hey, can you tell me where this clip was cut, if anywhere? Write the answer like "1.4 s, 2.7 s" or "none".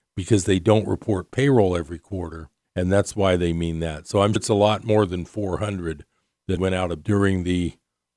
2.6 s, 4.4 s, 6.6 s, 7.0 s